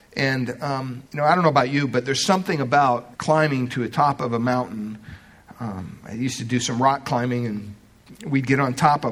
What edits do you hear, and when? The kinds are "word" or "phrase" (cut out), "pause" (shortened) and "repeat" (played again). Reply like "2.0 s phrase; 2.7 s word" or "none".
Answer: 1.1 s pause; 3.1 s pause